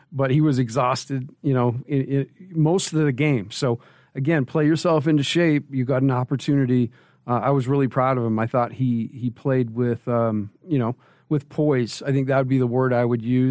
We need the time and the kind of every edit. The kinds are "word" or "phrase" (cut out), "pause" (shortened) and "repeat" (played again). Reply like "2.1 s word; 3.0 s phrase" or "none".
none